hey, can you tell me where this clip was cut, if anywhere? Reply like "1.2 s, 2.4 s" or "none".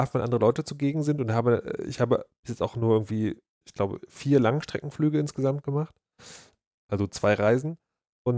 none